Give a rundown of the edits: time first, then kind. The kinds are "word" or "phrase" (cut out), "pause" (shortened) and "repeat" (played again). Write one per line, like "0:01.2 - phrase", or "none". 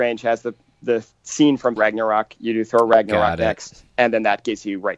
0:01.8 - word
0:03.9 - pause